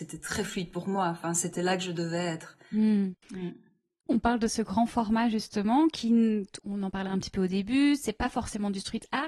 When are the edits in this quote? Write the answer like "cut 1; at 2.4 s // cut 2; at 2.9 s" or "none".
cut 1; at 3.2 s